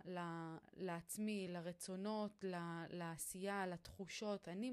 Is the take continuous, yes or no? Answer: yes